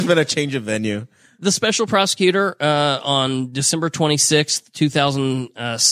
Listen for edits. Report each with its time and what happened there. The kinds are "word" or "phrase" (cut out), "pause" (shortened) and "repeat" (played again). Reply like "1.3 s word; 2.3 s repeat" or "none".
none